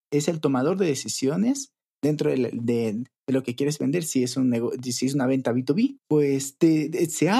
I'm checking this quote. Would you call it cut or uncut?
uncut